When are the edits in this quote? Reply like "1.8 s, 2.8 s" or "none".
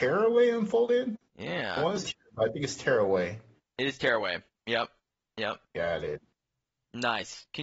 1.3 s, 2.0 s